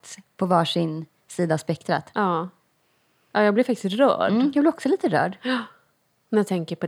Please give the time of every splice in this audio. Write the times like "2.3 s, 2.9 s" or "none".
none